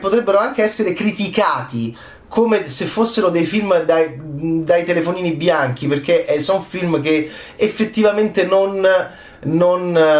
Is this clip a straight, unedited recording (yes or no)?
yes